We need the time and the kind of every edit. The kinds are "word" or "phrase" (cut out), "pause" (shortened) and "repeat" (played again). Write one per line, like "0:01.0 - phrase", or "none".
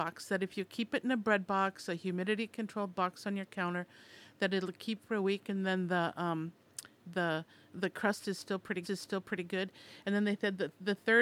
0:08.8 - repeat